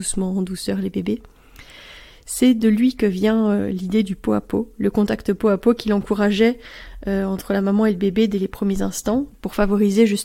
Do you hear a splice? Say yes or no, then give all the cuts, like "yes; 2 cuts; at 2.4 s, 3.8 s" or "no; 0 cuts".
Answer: no; 0 cuts